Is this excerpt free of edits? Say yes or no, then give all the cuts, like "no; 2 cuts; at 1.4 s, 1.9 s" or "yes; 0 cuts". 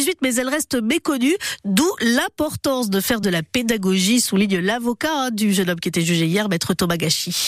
yes; 0 cuts